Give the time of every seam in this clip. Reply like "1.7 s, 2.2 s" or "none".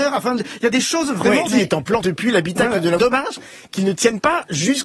1.5 s, 2.0 s, 3.0 s

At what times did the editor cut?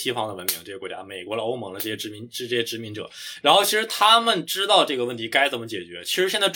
none

